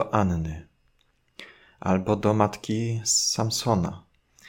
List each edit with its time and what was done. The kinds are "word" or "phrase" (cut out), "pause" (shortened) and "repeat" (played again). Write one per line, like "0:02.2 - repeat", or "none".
none